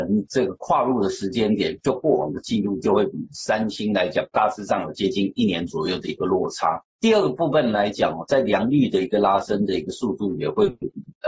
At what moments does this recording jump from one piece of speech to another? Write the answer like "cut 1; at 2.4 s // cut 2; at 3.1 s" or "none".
cut 1; at 6.9 s